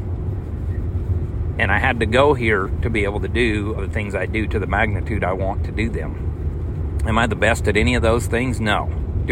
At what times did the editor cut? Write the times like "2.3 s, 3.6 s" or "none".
3.8 s